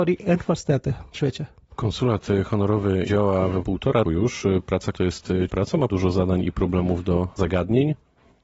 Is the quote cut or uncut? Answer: cut